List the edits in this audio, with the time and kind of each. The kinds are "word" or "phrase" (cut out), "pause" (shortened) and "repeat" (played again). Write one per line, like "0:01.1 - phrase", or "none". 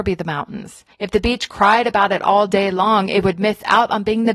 0:00.9 - pause

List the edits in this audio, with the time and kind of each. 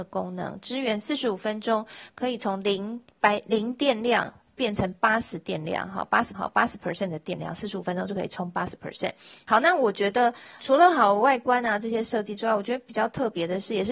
0:03.1 - pause
0:06.3 - repeat
0:10.6 - word

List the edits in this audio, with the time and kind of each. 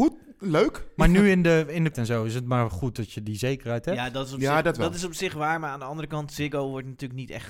0:01.9 - word

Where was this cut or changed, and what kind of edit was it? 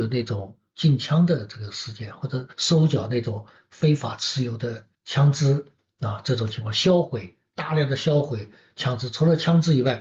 0:02.5 - pause
0:04.9 - pause

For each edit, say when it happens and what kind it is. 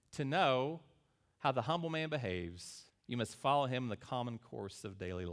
0:02.9 - pause

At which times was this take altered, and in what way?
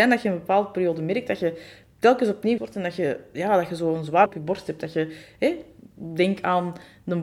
0:02.6 - word
0:04.3 - word

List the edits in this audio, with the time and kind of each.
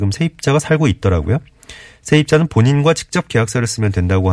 none

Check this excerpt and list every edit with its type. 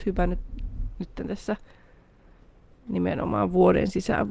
none

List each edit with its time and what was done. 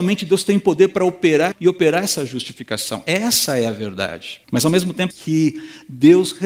0:01.5 - phrase
0:04.4 - pause
0:05.1 - phrase

